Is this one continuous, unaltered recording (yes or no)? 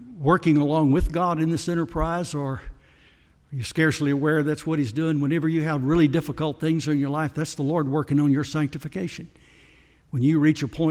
yes